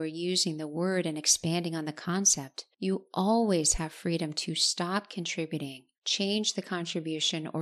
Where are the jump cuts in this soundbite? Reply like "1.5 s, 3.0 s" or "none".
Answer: 2.7 s, 5.9 s